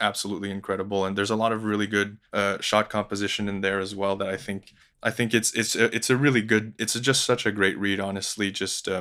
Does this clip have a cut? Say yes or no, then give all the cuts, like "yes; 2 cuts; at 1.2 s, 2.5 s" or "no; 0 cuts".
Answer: yes; 1 cut; at 2.3 s